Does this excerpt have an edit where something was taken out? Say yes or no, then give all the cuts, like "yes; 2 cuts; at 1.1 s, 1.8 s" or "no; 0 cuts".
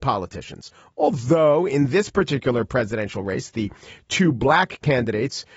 no; 0 cuts